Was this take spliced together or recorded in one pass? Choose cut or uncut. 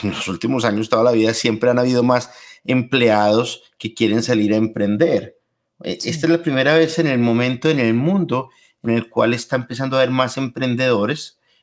uncut